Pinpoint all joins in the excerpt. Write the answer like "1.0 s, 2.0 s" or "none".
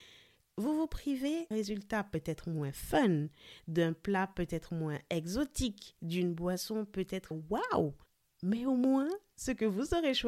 1.5 s, 7.3 s, 8.1 s